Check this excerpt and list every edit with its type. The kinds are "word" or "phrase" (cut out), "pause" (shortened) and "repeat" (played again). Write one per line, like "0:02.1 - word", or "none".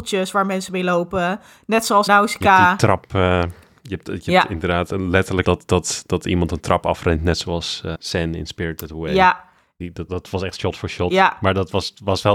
0:02.1 - word
0:05.4 - word
0:07.9 - word
0:10.1 - word